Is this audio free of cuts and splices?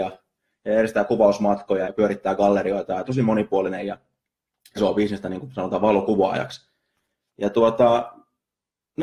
no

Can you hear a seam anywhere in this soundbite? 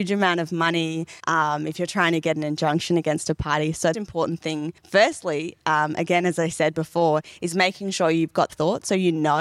yes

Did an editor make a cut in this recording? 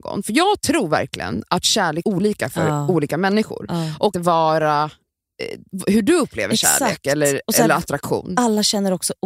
yes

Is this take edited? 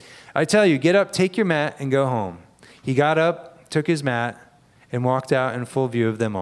no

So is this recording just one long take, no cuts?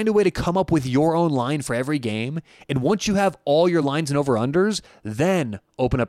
yes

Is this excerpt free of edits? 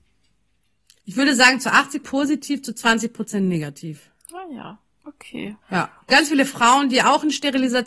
no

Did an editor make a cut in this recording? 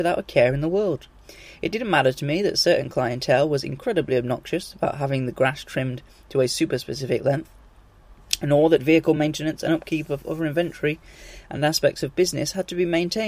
no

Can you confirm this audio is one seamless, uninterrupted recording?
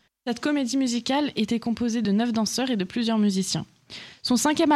yes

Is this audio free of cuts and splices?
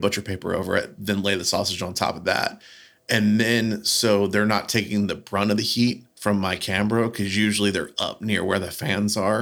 no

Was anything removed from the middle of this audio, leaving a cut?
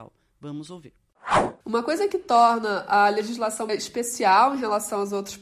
yes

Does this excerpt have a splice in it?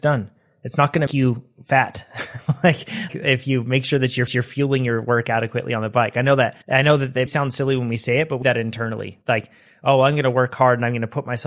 yes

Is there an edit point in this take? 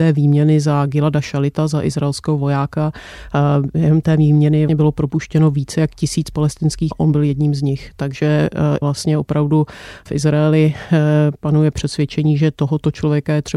yes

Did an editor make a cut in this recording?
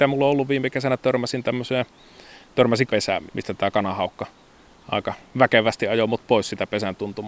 yes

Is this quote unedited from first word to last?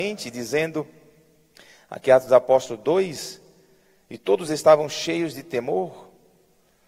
yes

